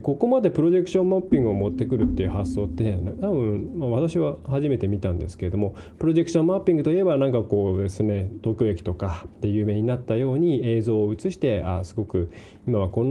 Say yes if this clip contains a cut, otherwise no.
no